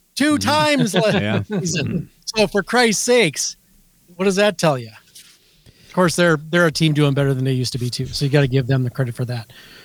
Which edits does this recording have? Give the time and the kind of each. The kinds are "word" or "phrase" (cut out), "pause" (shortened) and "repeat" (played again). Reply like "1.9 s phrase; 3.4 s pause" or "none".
none